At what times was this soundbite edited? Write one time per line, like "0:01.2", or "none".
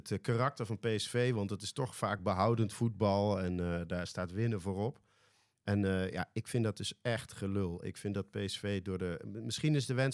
none